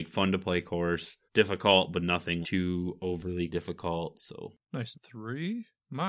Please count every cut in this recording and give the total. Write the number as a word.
four